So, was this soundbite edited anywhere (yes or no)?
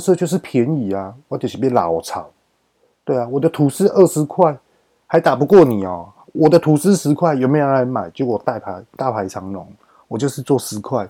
no